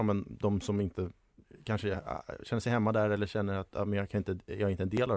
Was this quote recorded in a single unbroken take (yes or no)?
yes